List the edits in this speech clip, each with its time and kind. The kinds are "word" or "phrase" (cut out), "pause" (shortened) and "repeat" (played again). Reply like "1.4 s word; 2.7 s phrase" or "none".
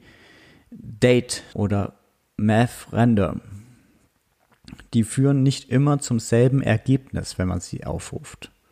1.5 s word